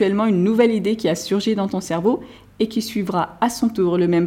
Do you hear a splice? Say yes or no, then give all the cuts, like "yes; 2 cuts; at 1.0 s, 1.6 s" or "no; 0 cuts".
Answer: no; 0 cuts